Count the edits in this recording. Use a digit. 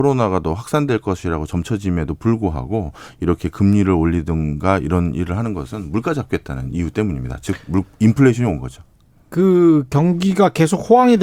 0